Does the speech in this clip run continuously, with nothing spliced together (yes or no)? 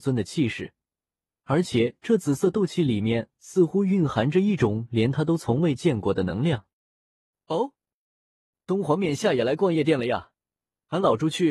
yes